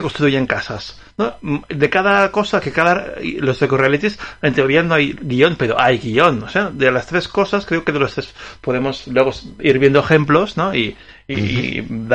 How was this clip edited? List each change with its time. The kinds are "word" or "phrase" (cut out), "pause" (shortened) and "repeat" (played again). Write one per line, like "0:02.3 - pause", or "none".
none

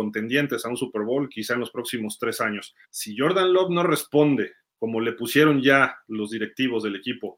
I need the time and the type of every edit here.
0:02.8 - pause

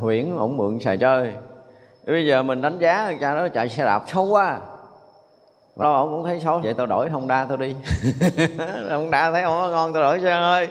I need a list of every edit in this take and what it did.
0:05.8 - word
0:06.6 - word

